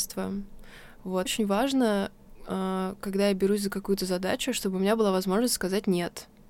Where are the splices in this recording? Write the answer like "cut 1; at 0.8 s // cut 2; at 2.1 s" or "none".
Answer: cut 1; at 1.3 s